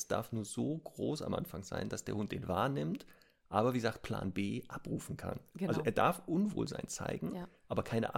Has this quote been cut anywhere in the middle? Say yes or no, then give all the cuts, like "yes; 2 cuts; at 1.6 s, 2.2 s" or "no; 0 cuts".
no; 0 cuts